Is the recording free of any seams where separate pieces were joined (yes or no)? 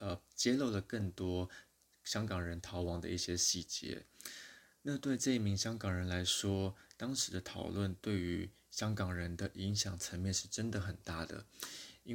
yes